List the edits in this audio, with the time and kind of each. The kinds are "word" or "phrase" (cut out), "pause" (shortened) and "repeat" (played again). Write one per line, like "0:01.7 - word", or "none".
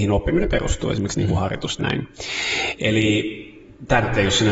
0:01.8 - word